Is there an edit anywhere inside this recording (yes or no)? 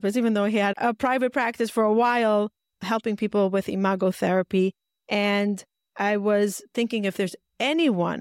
no